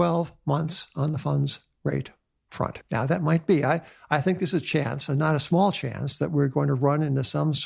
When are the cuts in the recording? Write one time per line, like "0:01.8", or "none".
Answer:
none